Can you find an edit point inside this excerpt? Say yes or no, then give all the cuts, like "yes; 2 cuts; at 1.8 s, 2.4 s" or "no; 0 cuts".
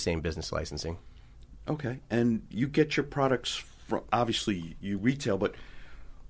no; 0 cuts